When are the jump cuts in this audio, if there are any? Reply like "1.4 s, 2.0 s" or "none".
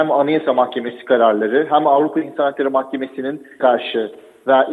3.6 s